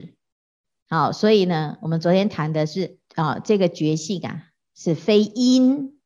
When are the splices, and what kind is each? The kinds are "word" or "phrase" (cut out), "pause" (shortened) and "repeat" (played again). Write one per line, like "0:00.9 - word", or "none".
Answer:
0:03.1 - pause